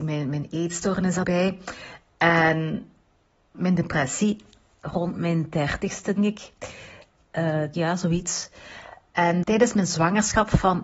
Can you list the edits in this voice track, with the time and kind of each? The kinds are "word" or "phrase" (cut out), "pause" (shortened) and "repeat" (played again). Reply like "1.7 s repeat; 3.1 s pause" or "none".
1.2 s word; 3.5 s word; 6.2 s word; 7.7 s word; 9.4 s word